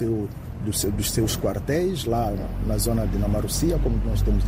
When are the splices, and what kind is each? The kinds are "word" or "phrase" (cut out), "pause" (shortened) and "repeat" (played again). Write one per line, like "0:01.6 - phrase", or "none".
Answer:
none